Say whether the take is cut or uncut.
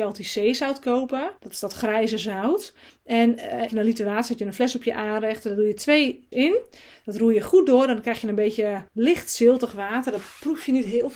cut